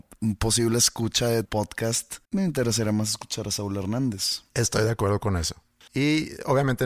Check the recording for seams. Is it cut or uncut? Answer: cut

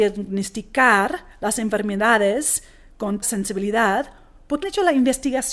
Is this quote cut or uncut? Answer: cut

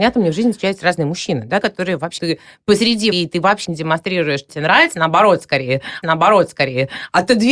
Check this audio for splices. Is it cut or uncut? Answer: cut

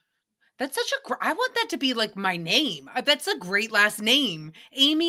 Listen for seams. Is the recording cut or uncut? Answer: uncut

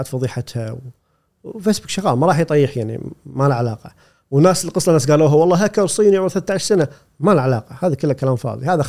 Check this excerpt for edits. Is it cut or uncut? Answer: uncut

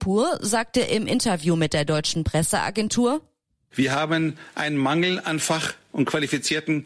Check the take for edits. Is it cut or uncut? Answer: uncut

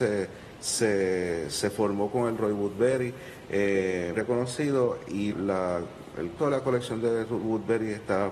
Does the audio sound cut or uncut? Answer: cut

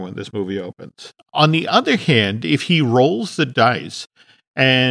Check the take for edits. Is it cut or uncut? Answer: uncut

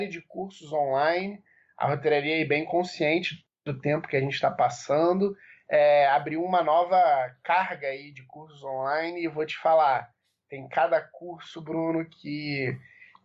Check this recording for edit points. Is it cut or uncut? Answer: uncut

